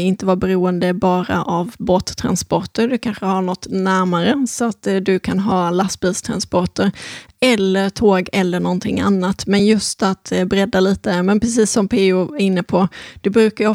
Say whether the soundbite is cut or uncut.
uncut